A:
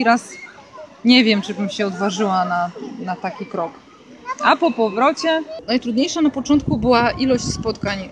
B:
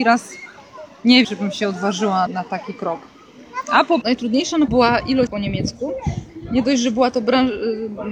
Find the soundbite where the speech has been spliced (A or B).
B